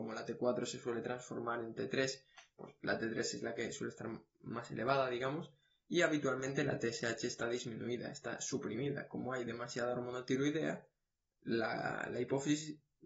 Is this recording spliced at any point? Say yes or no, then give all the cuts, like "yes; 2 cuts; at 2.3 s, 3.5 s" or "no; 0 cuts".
no; 0 cuts